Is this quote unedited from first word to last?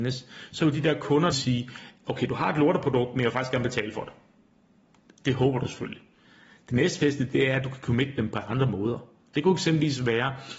no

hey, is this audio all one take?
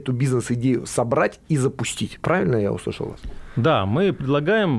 yes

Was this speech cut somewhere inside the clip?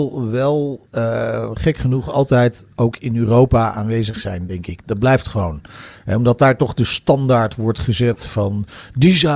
no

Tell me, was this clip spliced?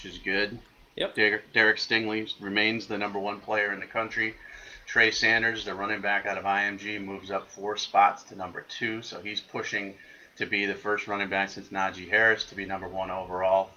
no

